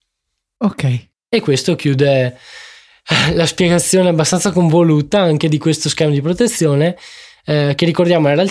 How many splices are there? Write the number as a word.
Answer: one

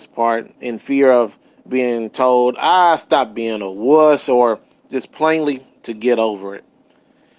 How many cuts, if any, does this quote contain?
zero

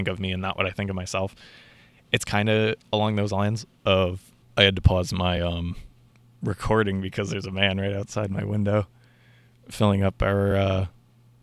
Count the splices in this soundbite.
zero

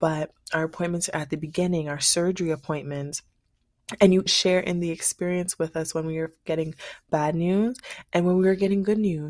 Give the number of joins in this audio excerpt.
one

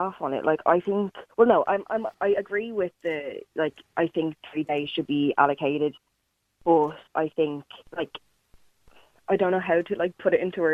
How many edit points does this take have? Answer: four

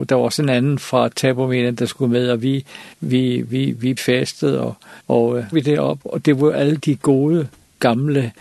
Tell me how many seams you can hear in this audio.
five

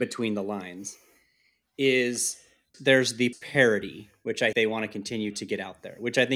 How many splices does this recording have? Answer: three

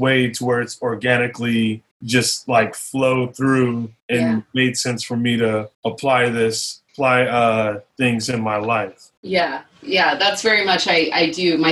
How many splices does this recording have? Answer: six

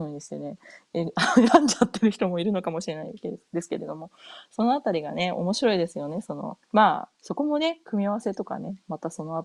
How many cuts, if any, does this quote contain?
two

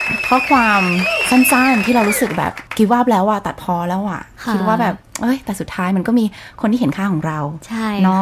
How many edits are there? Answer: one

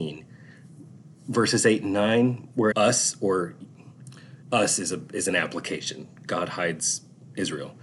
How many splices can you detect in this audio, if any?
two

